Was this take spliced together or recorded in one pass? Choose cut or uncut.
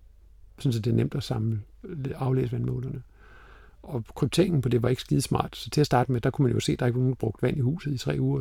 uncut